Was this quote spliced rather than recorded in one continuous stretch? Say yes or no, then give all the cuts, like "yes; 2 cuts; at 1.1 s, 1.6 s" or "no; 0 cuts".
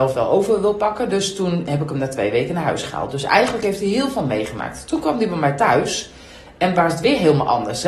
no; 0 cuts